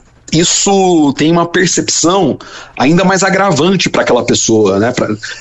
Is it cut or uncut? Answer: uncut